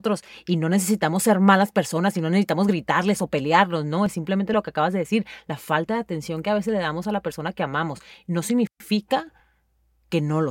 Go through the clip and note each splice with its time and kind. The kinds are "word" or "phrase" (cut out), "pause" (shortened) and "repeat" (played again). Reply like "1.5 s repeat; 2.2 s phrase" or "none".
none